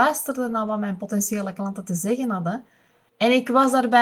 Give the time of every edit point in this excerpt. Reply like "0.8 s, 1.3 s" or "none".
none